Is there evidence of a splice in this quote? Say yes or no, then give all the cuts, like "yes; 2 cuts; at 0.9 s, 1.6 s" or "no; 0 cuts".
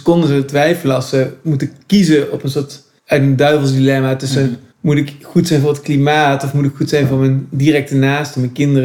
yes; 2 cuts; at 3.0 s, 4.7 s